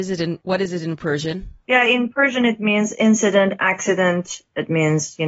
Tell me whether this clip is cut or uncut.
uncut